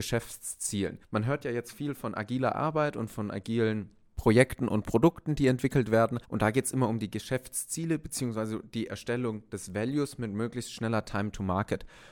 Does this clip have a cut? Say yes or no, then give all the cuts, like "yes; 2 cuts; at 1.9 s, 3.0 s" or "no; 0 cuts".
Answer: yes; 2 cuts; at 1.0 s, 6.2 s